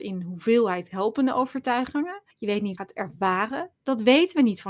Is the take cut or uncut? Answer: cut